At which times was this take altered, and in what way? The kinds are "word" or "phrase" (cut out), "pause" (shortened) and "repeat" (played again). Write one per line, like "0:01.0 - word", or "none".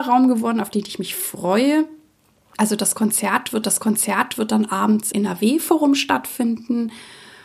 0:03.6 - repeat
0:05.1 - word